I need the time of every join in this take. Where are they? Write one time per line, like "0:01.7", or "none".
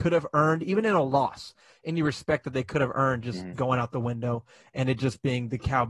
none